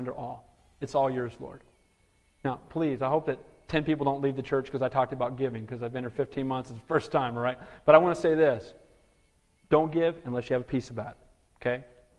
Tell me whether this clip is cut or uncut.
uncut